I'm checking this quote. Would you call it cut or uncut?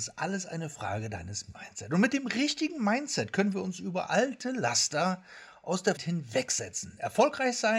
cut